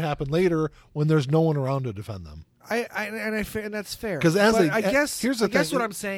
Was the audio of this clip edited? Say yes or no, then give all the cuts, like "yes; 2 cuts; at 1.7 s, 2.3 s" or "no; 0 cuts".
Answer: no; 0 cuts